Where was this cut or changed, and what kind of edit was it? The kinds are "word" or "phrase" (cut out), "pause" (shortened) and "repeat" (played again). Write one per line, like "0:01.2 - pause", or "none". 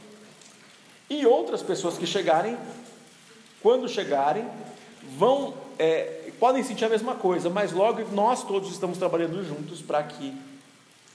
none